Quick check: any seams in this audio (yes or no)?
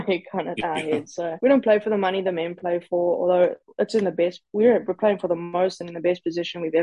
no